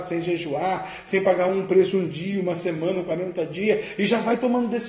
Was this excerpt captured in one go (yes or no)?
yes